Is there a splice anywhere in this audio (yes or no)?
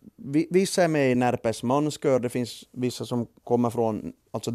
no